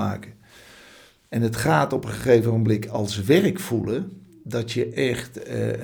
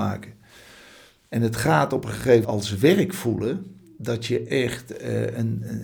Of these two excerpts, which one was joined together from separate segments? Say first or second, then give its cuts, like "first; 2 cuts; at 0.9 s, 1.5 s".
second; 1 cut; at 2.4 s